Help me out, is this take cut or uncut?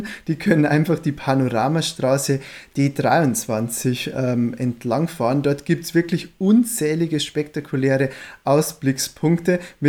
uncut